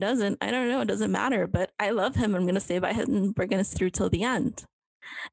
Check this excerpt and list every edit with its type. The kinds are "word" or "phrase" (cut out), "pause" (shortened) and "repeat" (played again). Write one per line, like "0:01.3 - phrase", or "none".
0:03.1 - word
0:03.7 - word